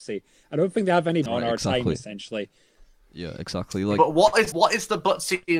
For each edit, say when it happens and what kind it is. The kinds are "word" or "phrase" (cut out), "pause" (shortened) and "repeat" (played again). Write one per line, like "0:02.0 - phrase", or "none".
0:01.3 - word
0:04.5 - word